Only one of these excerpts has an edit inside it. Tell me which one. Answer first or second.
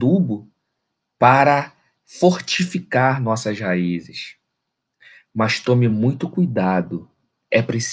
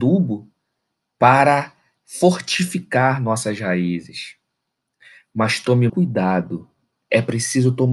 second